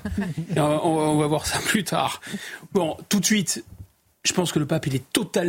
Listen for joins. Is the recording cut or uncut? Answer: uncut